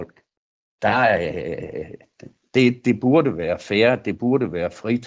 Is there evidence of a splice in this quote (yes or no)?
no